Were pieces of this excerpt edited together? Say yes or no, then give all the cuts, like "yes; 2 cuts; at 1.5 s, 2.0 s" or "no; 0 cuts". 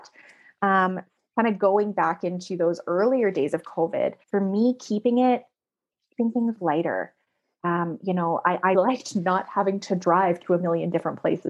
yes; 3 cuts; at 1.2 s, 4.2 s, 8.7 s